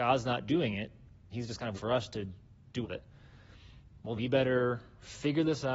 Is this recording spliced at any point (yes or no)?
yes